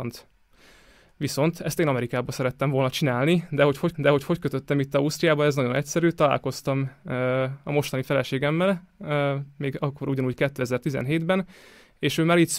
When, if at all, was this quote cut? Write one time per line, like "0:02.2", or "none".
0:03.9